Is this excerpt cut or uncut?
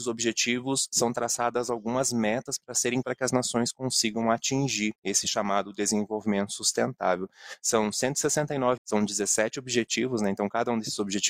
cut